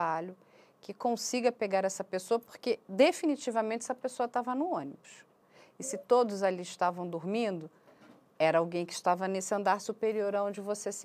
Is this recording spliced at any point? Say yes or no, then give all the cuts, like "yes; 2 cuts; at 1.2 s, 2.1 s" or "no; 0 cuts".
no; 0 cuts